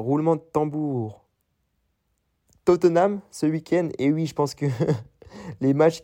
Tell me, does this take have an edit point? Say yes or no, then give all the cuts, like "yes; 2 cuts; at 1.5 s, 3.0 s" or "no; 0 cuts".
no; 0 cuts